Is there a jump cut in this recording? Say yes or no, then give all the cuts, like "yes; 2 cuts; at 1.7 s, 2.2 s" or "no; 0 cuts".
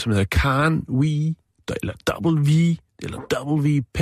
no; 0 cuts